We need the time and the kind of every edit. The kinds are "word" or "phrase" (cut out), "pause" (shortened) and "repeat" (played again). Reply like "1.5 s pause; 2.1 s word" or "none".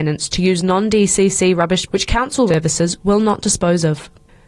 1.9 s word; 2.5 s word